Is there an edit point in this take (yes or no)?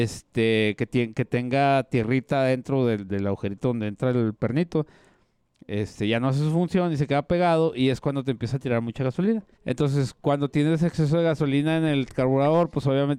yes